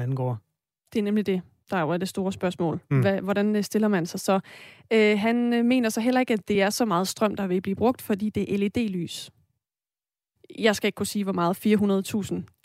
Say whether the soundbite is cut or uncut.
uncut